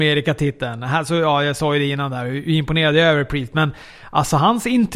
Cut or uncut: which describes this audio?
uncut